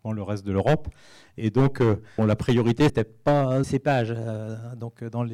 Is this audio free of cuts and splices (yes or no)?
no